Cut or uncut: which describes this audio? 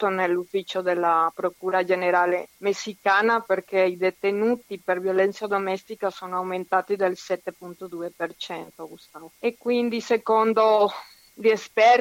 cut